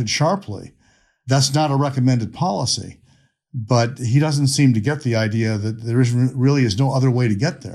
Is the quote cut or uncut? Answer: uncut